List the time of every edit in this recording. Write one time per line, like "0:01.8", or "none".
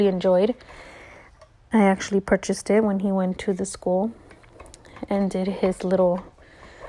none